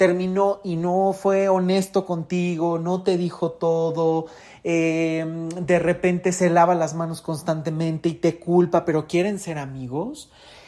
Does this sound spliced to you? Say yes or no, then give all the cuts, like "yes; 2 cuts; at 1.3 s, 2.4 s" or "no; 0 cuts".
no; 0 cuts